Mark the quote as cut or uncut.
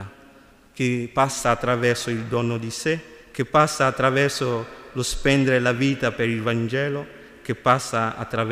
cut